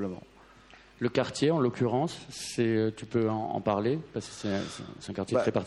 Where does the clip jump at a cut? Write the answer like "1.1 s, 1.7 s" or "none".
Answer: none